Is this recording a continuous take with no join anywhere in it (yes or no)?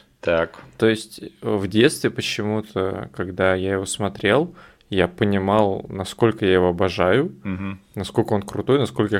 yes